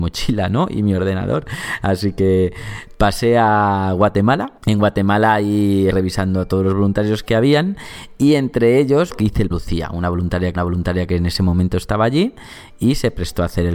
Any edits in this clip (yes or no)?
yes